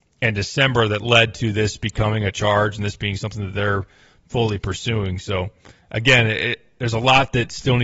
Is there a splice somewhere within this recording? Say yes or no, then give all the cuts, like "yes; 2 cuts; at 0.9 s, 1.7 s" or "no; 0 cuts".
no; 0 cuts